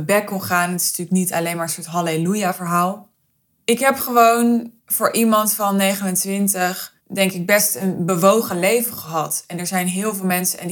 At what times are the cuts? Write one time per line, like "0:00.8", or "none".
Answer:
0:03.4
0:04.8
0:07.0